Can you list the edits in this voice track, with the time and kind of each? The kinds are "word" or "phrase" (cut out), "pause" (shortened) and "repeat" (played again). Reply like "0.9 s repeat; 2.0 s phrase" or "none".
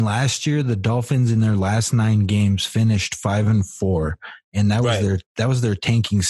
none